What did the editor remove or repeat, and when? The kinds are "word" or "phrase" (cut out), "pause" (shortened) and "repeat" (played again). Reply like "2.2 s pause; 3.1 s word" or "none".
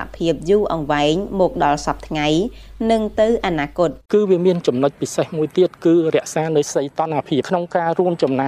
4.0 s pause

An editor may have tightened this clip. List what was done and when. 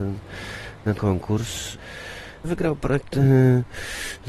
1.0 s word

